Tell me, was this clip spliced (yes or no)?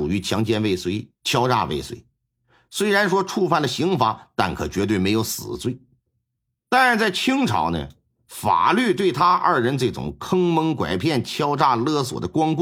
no